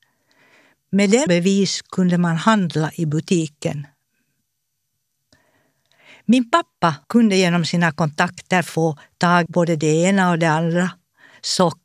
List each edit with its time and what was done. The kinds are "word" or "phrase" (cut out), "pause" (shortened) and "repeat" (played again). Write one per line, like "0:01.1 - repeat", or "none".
0:01.3 - word
0:07.0 - pause
0:09.5 - word

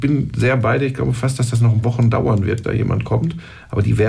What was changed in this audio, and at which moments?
0:01.8 - word
0:02.6 - word

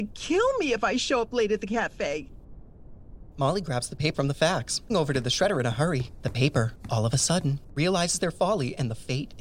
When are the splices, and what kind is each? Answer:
0:04.1 - word
0:04.9 - word

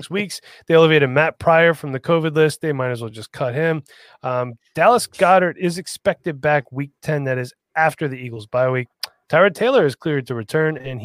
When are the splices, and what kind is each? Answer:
none

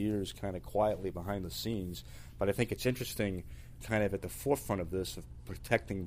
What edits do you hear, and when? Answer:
0:03.8 - phrase

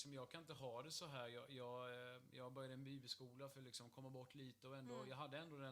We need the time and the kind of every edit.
none

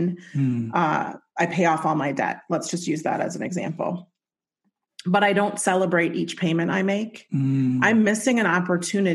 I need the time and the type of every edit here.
none

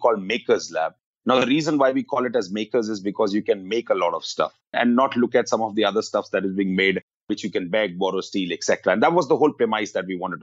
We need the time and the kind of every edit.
none

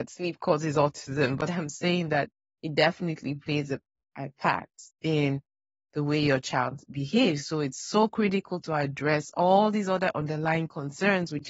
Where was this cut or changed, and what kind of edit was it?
none

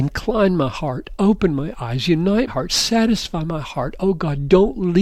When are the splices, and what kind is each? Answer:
0:02.5 - word

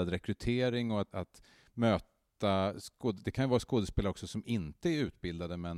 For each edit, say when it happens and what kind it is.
0:01.1 - word

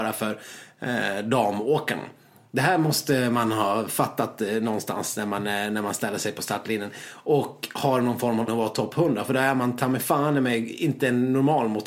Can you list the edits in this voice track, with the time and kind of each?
0:08.5 - word

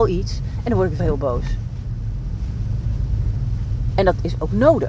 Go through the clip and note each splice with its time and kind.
0:01.0 - word

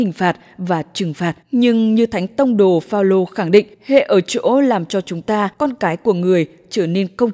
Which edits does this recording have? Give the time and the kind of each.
0:01.4 - pause
0:03.7 - pause
0:05.5 - pause

